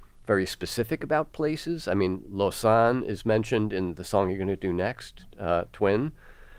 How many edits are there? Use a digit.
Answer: 0